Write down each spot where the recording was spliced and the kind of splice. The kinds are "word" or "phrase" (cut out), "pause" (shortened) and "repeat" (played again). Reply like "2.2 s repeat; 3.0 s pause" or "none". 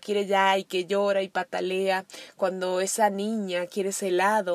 none